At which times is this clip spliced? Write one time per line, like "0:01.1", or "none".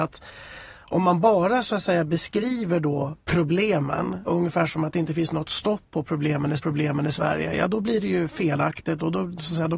0:04.3
0:06.6